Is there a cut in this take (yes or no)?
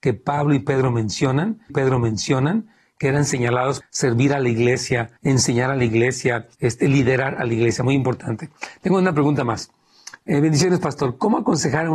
yes